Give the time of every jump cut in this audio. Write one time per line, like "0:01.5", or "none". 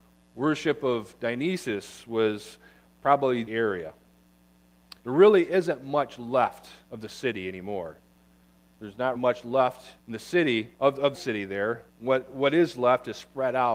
0:03.5
0:05.0
0:06.8
0:09.2
0:10.0
0:10.7
0:11.1
0:11.9